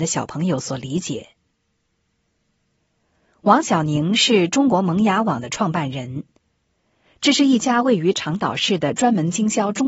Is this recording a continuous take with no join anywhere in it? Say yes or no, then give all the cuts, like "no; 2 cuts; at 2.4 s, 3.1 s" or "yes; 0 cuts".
yes; 0 cuts